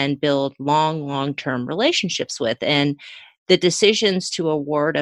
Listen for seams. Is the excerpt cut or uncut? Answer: uncut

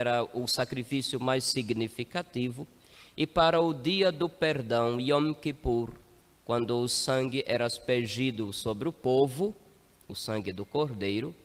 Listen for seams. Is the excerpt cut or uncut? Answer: uncut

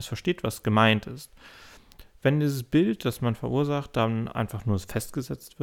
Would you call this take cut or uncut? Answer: uncut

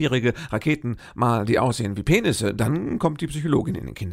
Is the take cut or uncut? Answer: uncut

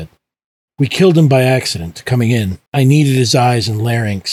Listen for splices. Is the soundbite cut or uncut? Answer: cut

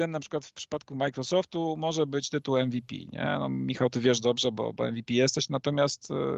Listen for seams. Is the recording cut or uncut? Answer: uncut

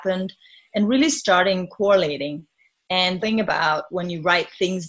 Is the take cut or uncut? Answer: cut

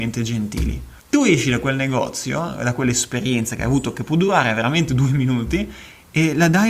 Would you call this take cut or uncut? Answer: cut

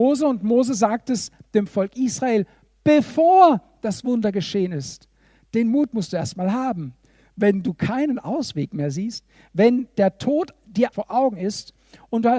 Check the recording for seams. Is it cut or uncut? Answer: cut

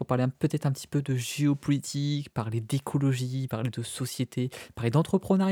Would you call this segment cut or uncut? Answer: uncut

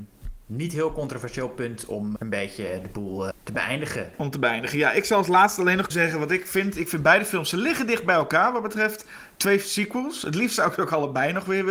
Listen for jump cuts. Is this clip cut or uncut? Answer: cut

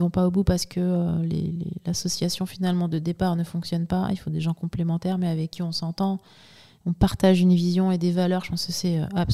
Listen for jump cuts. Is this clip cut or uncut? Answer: uncut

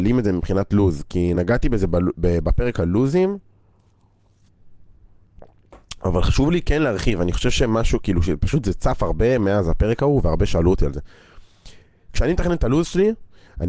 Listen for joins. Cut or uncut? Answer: uncut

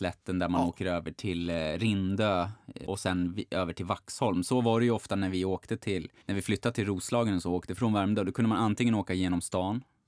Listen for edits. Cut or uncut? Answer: cut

